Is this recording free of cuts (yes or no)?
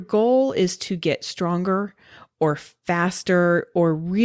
yes